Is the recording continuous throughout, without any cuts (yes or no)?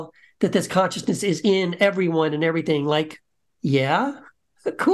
yes